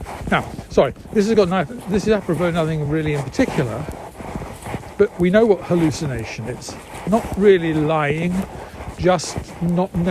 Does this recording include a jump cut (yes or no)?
no